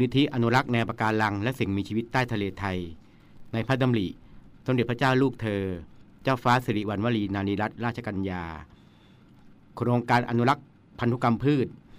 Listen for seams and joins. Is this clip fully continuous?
yes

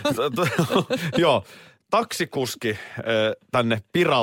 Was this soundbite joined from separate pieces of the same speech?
no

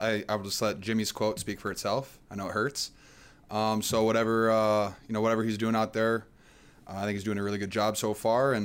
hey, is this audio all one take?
yes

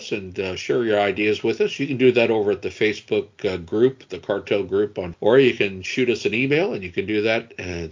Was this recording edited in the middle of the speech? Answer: yes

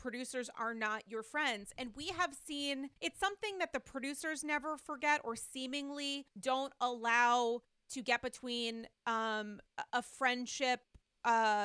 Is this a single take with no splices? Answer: no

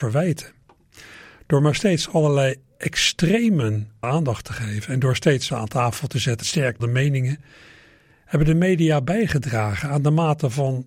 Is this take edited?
yes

